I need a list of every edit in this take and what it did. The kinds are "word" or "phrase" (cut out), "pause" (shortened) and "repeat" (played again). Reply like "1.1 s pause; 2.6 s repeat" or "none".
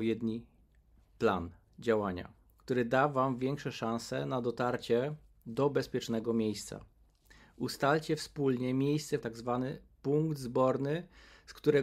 9.2 s phrase